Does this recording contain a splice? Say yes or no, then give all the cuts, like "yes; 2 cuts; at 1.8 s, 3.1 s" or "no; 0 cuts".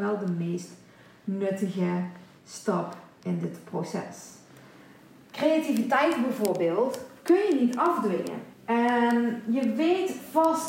yes; 1 cut; at 8.5 s